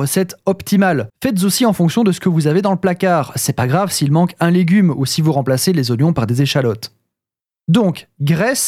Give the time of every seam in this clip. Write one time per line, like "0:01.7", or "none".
0:01.1